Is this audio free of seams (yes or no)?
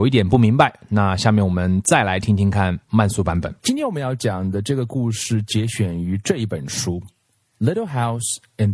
no